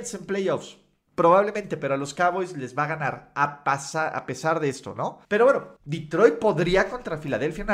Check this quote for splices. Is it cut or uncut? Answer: cut